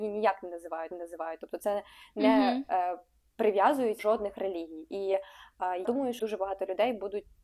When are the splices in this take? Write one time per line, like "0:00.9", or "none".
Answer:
0:00.9
0:04.0
0:05.8
0:06.2